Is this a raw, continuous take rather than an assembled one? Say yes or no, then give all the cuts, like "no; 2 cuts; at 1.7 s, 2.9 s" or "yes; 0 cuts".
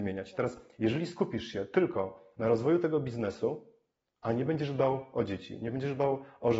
yes; 0 cuts